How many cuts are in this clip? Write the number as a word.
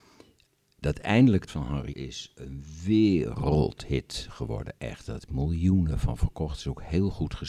two